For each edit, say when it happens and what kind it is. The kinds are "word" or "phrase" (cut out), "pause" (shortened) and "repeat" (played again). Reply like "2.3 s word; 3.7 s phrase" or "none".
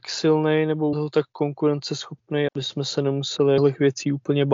0.9 s word; 2.5 s word; 3.6 s phrase